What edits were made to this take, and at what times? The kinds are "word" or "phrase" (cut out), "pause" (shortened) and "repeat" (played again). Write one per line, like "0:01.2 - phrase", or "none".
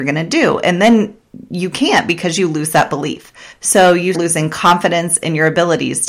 0:03.5 - pause
0:04.1 - word